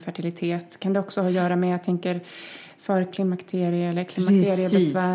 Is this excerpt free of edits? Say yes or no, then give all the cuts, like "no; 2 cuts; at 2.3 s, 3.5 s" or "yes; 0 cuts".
yes; 0 cuts